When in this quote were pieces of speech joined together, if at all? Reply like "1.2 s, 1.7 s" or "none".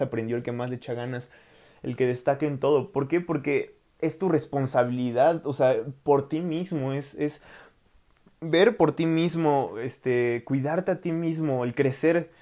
none